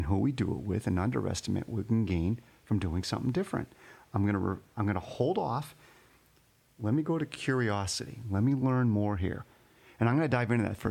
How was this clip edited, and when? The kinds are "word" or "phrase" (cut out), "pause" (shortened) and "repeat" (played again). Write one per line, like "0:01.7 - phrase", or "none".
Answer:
none